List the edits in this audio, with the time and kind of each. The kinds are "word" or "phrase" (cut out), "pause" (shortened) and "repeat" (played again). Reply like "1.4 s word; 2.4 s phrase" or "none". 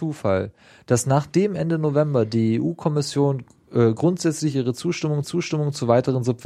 5.2 s repeat